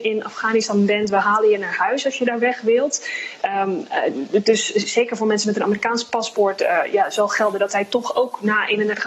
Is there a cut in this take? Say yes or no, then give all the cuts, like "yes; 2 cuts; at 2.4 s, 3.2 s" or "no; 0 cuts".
no; 0 cuts